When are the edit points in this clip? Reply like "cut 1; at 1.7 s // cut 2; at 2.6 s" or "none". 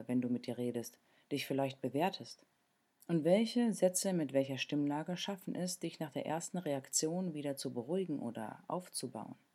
none